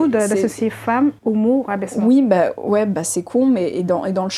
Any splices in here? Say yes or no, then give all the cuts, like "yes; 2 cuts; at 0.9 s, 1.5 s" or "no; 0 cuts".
yes; 1 cut; at 1.2 s